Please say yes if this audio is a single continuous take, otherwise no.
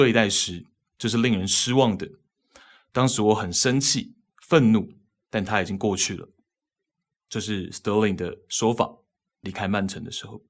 yes